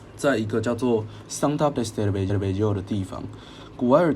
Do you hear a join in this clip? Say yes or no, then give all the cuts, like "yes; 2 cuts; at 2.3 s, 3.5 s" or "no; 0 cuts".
yes; 2 cuts; at 1.7 s, 2.3 s